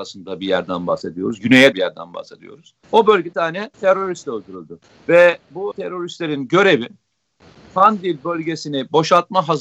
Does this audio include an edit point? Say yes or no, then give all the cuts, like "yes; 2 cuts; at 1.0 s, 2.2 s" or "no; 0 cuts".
yes; 6 cuts; at 1.7 s, 2.8 s, 3.3 s, 3.7 s, 5.0 s, 5.7 s